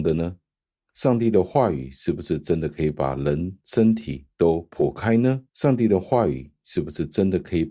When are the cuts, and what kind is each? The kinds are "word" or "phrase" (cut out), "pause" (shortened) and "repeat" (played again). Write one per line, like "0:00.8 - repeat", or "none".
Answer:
0:05.5 - pause